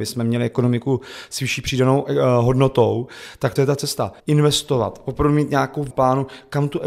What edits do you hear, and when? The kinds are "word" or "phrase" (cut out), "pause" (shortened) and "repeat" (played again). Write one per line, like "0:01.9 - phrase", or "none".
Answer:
0:03.6 - word
0:04.2 - pause
0:05.9 - phrase